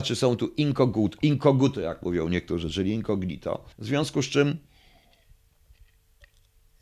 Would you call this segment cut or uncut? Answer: cut